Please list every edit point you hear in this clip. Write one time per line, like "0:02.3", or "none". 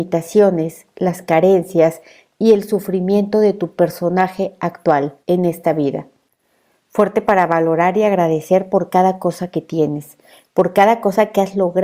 0:05.2